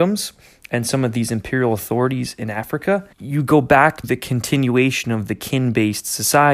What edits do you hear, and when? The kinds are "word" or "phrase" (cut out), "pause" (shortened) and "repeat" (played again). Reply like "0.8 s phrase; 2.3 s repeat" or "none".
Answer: 3.1 s pause; 4.0 s word